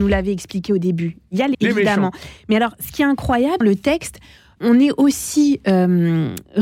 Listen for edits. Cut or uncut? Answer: cut